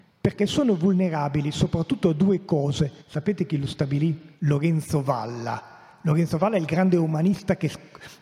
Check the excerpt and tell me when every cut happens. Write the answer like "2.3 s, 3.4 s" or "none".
3.0 s, 4.4 s